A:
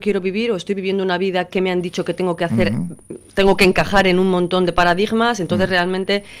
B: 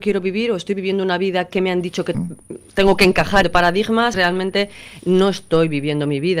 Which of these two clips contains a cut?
B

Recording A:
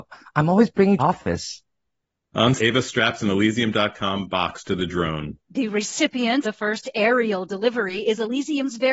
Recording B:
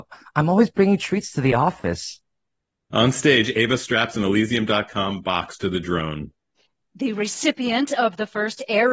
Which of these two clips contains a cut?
A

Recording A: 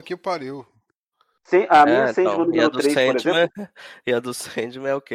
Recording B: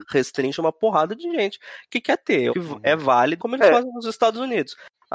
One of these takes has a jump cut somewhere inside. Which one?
B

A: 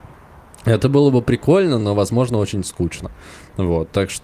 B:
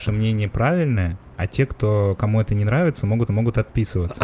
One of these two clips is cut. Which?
B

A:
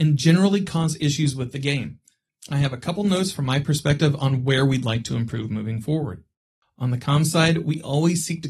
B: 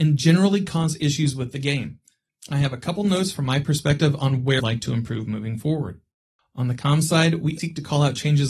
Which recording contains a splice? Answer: B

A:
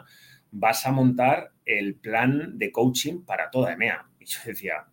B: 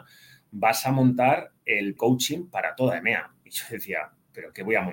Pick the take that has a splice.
B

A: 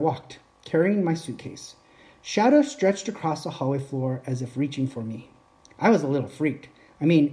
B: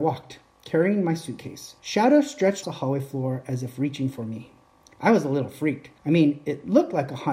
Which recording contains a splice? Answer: B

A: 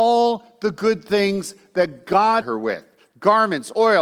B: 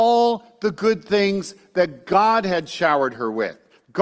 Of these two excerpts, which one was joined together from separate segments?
A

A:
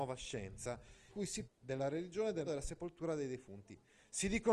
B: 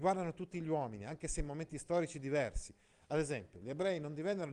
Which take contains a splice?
A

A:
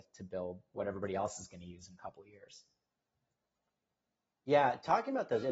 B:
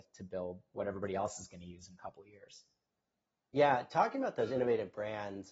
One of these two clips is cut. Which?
B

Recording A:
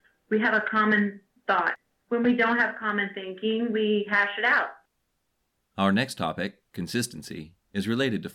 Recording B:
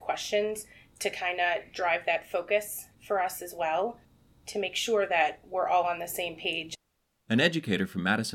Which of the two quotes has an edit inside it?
B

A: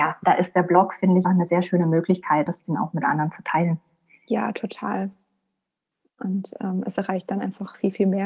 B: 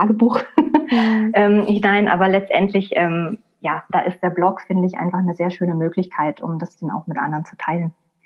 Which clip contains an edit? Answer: A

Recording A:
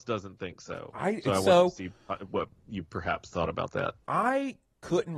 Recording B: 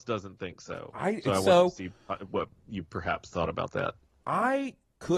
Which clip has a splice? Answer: A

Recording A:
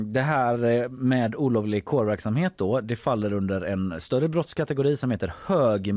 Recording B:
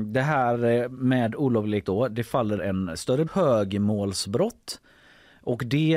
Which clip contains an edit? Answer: B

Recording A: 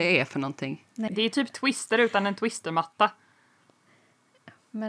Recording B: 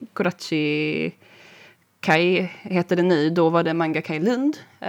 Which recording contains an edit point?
A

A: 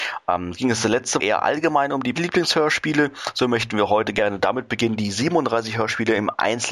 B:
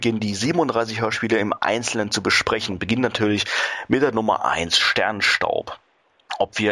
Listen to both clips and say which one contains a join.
A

